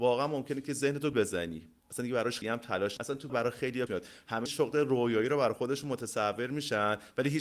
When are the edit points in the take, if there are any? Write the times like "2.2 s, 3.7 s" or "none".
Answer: 1.1 s, 2.4 s, 3.0 s, 3.3 s, 3.9 s, 4.5 s